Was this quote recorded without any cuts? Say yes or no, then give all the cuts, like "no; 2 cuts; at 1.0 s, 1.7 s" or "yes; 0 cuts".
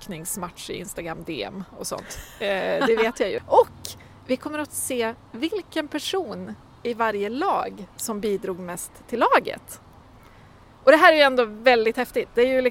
no; 1 cut; at 7.9 s